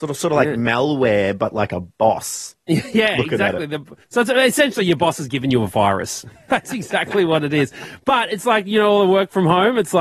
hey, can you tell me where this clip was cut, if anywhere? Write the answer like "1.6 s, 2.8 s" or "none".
none